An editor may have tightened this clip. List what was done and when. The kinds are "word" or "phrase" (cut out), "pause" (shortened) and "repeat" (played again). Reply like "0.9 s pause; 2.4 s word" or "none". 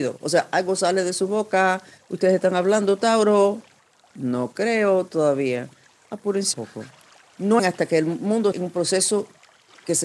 6.5 s word; 7.6 s word; 8.5 s word